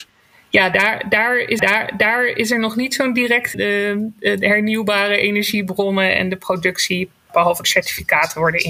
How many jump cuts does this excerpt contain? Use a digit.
3